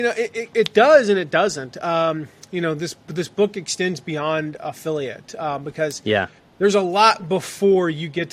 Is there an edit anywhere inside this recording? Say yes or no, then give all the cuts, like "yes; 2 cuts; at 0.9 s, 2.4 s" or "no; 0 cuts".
no; 0 cuts